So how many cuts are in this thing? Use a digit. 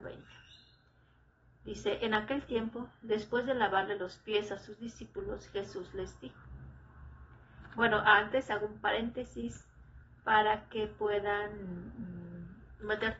0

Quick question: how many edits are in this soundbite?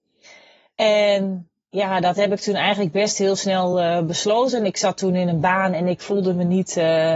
0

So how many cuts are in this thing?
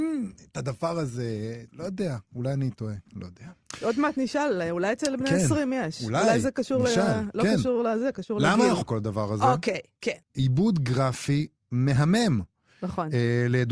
3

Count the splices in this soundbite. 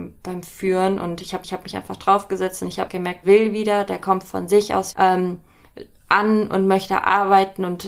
4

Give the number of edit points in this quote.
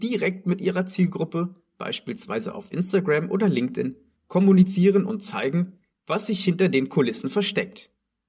0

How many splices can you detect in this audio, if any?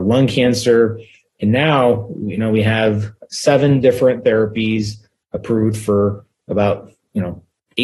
0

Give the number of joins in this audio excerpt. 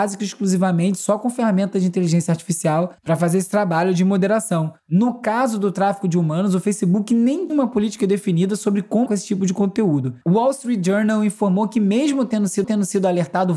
6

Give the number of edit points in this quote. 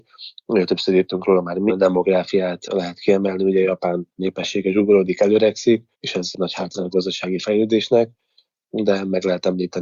4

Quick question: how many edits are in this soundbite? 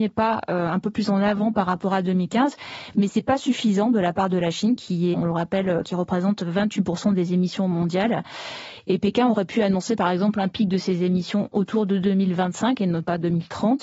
1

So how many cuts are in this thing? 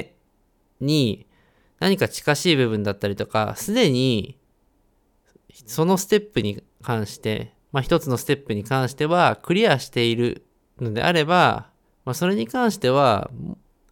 1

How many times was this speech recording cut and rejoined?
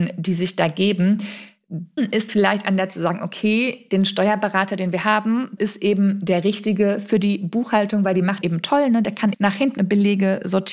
7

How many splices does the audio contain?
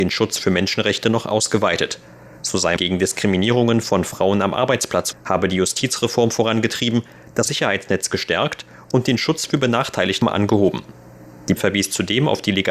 5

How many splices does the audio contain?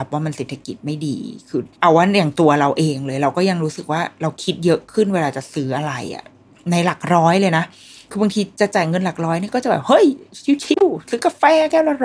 1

